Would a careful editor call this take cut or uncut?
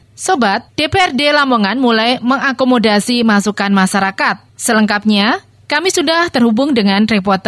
uncut